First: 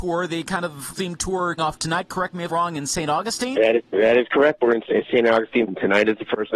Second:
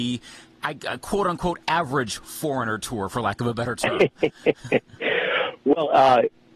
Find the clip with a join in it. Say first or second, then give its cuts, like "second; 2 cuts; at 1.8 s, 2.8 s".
first; 5 cuts; at 0.9 s, 1.6 s, 2.5 s, 3.8 s, 5.7 s